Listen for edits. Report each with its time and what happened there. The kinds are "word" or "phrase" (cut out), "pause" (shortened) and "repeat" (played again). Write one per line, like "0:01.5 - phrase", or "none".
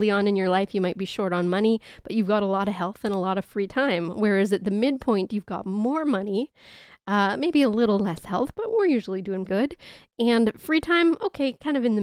0:09.5 - word